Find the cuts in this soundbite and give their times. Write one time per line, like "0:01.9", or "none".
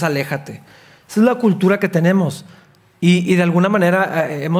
none